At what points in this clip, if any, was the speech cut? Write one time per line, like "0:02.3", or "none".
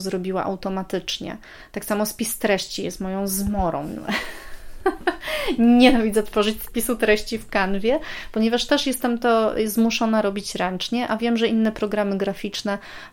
none